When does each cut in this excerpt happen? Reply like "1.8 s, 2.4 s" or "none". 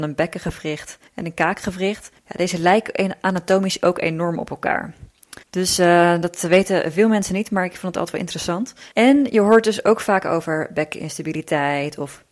1.1 s, 2.2 s, 5.4 s, 8.9 s